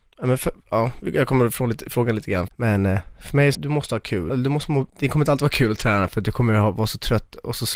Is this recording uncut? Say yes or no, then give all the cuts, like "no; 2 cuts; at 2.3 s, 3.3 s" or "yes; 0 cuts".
no; 4 cuts; at 2.5 s, 3.5 s, 4.3 s, 4.9 s